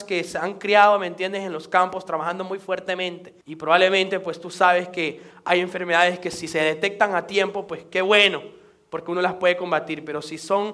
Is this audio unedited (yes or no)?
no